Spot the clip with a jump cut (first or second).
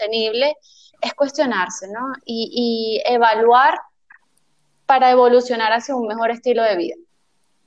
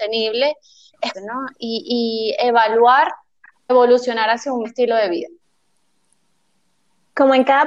second